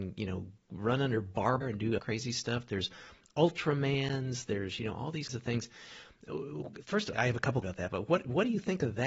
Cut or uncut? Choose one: cut